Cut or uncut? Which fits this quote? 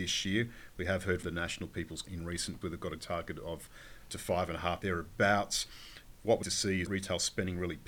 cut